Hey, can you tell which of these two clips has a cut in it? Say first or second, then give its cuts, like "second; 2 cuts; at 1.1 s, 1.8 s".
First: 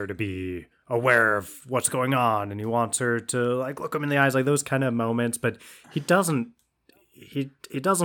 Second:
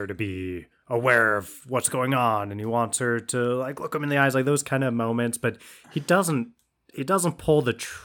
second; 1 cut; at 6.9 s